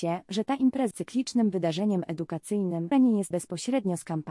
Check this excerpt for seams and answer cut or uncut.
cut